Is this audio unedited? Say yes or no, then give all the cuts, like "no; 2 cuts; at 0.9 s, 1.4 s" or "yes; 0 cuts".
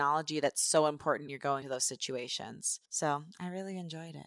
no; 3 cuts; at 1.3 s, 1.6 s, 2.9 s